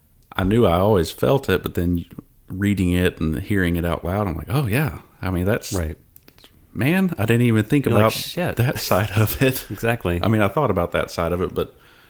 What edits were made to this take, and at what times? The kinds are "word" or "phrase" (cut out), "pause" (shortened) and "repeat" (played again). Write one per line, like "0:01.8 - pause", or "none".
none